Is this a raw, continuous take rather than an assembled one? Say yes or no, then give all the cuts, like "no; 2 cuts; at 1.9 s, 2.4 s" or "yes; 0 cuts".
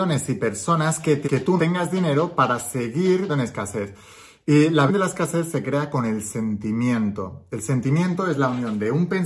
no; 4 cuts; at 1.2 s, 1.6 s, 3.3 s, 4.9 s